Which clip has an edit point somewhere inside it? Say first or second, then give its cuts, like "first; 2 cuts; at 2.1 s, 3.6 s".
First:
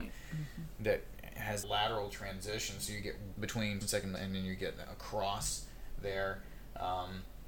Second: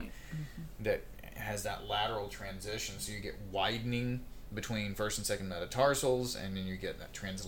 first; 5 cuts; at 1.6 s, 3.3 s, 3.8 s, 4.2 s, 4.9 s